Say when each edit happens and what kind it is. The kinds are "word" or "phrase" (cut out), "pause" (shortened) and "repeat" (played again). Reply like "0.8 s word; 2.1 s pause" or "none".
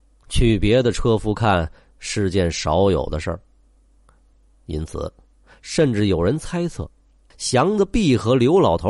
none